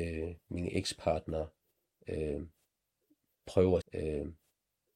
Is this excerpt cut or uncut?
cut